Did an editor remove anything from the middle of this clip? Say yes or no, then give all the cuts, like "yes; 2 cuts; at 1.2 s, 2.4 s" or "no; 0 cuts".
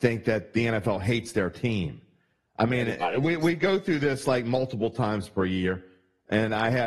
no; 0 cuts